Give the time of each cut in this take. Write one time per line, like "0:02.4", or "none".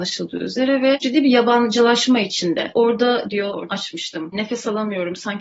0:01.0
0:03.3
0:03.7